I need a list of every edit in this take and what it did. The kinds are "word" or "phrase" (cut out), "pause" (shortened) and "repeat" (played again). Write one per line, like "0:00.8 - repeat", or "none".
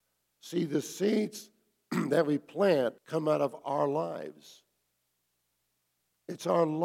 0:03.0 - pause